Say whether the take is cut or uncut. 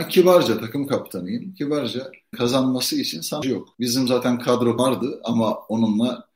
cut